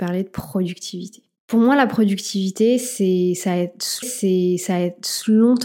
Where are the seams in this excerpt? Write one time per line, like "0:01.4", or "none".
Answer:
0:04.0